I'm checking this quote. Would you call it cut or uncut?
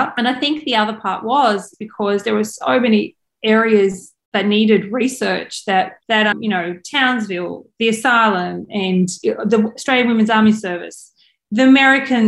cut